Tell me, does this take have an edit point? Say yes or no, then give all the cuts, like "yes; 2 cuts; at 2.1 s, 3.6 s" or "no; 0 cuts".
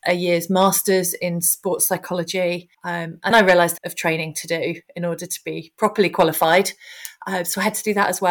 yes; 3 cuts; at 2.7 s, 3.3 s, 3.8 s